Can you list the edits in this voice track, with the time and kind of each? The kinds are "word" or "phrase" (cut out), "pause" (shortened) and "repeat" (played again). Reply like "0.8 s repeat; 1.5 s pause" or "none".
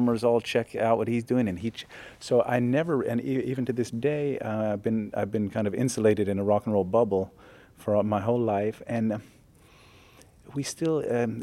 none